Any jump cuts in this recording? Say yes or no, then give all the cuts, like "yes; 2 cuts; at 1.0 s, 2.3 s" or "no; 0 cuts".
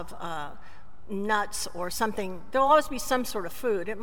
no; 0 cuts